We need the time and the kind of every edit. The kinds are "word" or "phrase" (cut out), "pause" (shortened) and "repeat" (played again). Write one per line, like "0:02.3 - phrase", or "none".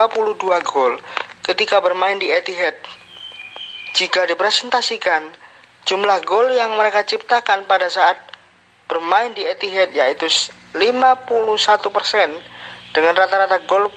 none